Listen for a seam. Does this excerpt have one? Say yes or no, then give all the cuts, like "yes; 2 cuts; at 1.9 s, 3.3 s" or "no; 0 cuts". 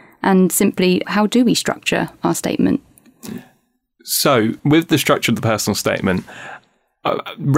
yes; 2 cuts; at 1.0 s, 4.6 s